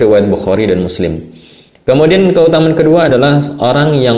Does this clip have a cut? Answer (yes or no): no